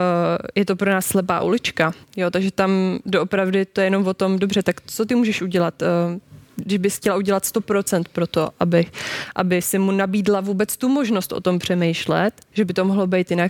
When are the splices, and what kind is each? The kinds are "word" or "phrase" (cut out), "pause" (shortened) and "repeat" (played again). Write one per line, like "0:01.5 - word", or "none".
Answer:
0:02.0 - pause
0:06.4 - pause